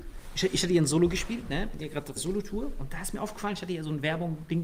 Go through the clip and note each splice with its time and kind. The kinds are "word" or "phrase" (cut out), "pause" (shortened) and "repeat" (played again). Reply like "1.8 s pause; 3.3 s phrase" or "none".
2.2 s word